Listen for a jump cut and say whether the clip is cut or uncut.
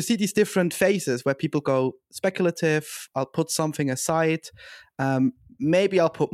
uncut